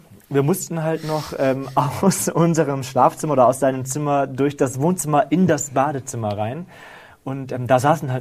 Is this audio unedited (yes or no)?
yes